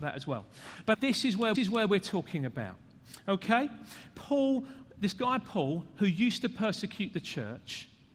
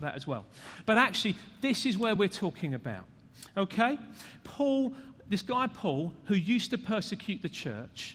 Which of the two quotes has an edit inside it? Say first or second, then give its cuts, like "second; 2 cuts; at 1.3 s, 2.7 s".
first; 2 cuts; at 0.9 s, 1.5 s